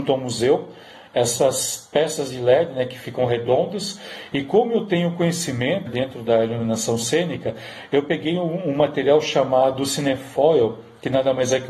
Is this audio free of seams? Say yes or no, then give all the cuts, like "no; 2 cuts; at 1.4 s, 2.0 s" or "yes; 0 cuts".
no; 1 cut; at 5.9 s